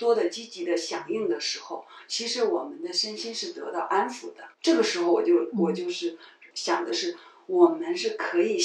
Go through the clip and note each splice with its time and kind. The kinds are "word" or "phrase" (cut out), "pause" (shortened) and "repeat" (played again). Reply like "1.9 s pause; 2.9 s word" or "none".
4.5 s pause; 6.5 s word